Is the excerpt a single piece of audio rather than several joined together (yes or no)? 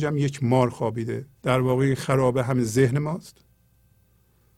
no